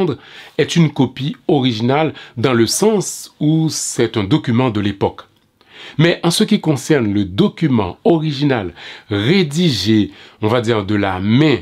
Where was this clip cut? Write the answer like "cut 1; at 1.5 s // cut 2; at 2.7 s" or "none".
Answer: none